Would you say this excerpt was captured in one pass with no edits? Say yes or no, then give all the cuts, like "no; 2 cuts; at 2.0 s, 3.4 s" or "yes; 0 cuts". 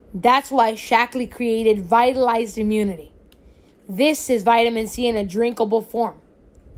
yes; 0 cuts